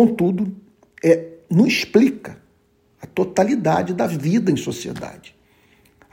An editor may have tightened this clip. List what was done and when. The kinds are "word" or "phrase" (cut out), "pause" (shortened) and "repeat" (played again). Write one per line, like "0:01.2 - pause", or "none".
none